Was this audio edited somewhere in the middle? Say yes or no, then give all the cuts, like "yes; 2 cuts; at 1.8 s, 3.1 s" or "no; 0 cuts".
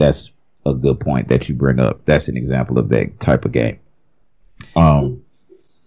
no; 0 cuts